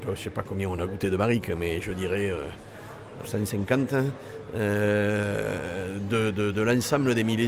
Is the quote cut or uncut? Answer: cut